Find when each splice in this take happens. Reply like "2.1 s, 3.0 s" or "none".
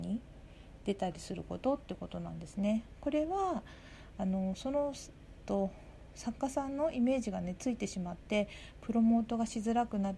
5.4 s